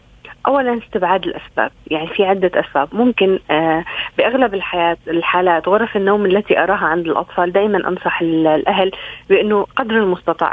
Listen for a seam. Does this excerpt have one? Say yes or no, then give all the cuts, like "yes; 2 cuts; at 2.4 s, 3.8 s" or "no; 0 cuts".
no; 0 cuts